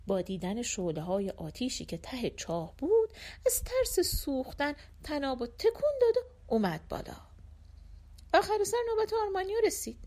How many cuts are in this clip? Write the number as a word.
zero